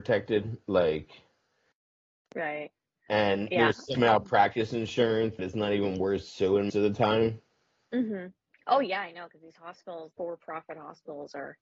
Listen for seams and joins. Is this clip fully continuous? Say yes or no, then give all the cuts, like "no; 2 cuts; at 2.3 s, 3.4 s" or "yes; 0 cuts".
no; 4 cuts; at 3.9 s, 5.4 s, 6.7 s, 10.1 s